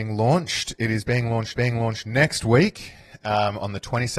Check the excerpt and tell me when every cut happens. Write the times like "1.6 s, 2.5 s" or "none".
1.5 s